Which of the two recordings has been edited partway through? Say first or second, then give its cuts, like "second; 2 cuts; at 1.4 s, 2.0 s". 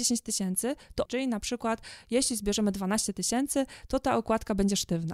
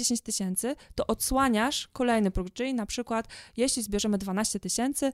first; 1 cut; at 1.1 s